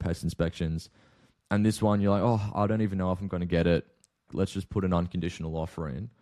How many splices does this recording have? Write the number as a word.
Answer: one